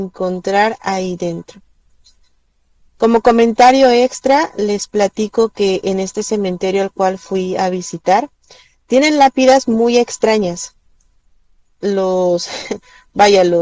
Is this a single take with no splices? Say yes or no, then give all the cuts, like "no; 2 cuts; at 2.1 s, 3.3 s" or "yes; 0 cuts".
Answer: yes; 0 cuts